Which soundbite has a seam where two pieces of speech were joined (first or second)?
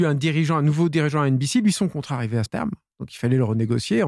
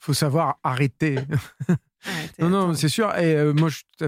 first